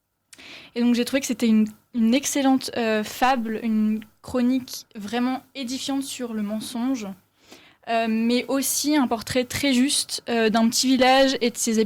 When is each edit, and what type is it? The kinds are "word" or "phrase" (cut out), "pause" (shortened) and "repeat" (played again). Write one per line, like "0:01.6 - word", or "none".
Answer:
none

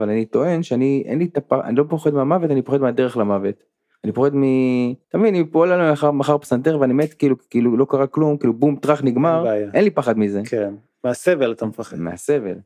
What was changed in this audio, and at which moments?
0:05.0 - pause

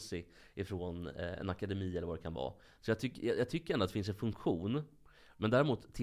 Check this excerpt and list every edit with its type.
none

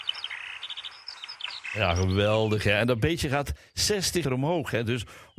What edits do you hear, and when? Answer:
0:04.2 - word

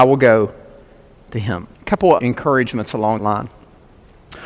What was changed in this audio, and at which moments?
0:01.7 - pause
0:02.2 - word
0:03.2 - word

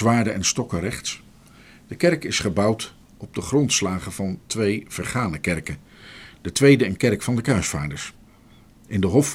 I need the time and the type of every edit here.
none

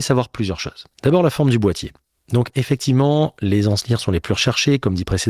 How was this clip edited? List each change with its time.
0:00.9 - pause

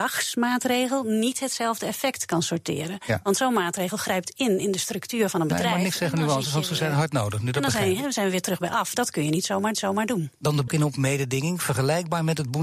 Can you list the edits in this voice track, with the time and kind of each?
0:09.7 - repeat
0:10.7 - phrase

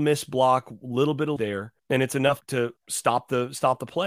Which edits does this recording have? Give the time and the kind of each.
0:01.4 - word
0:01.8 - pause
0:02.4 - word
0:02.8 - pause

